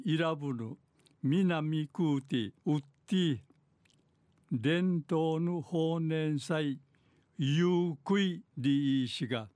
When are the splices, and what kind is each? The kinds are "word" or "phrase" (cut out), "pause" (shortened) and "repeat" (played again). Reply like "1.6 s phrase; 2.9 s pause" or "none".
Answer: 2.6 s pause; 8.5 s pause